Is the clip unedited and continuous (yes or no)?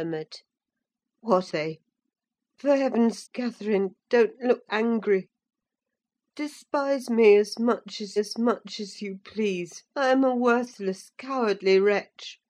no